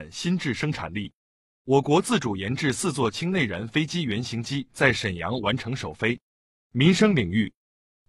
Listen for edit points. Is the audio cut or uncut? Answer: uncut